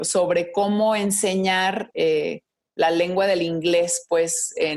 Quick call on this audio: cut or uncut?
uncut